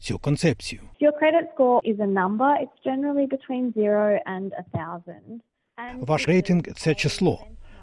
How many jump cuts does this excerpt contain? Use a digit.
2